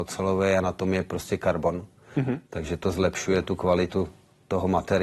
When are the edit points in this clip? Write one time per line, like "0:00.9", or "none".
none